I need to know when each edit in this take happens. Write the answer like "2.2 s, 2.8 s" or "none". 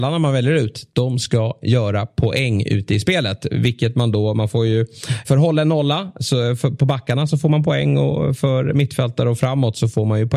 5.2 s